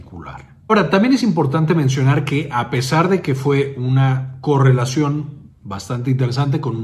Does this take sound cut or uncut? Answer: uncut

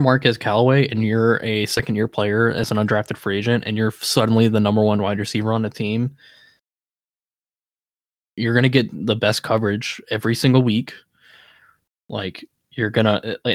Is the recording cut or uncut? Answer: uncut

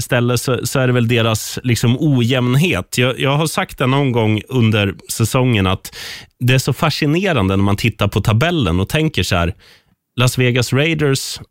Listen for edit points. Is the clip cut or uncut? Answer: uncut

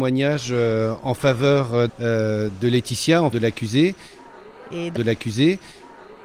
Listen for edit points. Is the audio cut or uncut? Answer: cut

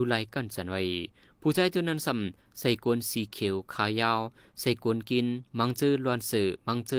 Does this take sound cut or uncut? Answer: uncut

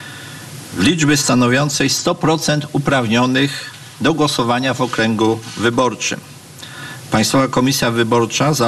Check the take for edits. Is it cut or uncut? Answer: uncut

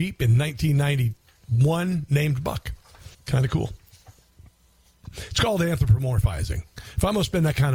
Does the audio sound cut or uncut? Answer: cut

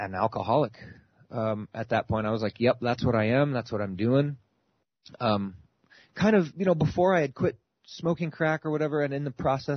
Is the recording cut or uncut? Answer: uncut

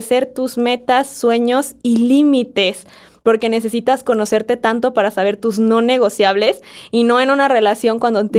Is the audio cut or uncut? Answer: uncut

